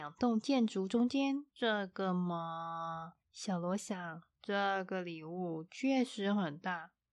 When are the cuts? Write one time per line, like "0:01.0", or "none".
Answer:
0:01.5
0:03.2
0:04.3